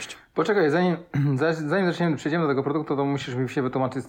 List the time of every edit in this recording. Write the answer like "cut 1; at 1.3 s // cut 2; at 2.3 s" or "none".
none